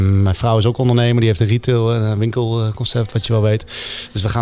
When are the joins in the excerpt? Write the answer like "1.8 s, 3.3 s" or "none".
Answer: 3.2 s